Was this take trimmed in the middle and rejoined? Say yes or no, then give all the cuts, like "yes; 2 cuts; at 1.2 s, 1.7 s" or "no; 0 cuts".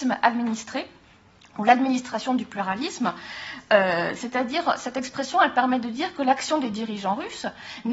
no; 0 cuts